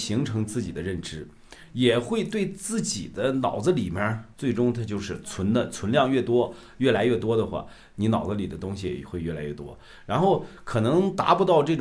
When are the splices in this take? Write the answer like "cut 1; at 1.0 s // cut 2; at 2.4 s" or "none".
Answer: cut 1; at 4.3 s